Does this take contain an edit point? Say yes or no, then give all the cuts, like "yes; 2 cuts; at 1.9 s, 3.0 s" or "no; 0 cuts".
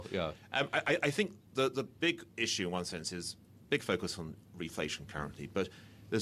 no; 0 cuts